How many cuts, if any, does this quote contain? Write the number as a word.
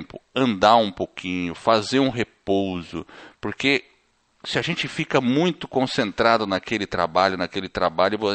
zero